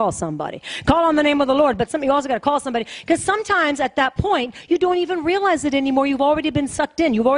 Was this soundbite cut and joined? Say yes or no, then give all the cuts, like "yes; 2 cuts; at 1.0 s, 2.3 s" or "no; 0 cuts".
no; 0 cuts